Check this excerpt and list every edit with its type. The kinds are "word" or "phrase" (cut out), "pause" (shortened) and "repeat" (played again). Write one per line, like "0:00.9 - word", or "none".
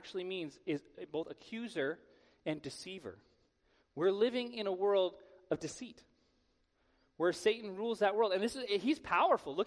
none